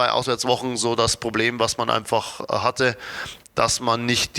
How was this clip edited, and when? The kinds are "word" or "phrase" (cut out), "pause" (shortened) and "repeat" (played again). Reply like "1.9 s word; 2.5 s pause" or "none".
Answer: none